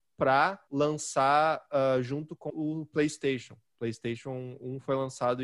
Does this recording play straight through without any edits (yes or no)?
no